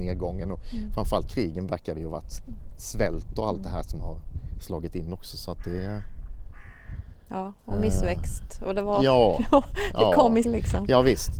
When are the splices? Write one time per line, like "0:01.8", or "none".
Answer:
0:01.3
0:04.0
0:10.4